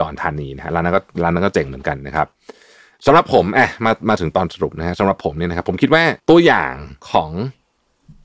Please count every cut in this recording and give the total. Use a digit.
2